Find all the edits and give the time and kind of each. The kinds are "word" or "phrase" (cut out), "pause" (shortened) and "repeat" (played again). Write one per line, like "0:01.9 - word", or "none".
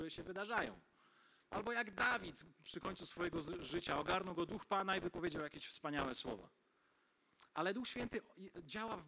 none